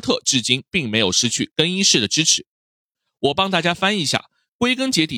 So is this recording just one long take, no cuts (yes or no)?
yes